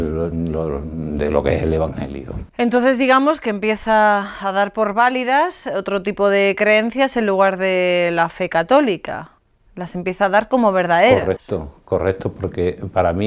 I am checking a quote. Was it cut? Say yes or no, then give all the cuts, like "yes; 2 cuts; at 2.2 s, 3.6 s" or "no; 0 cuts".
yes; 2 cuts; at 2.5 s, 9.4 s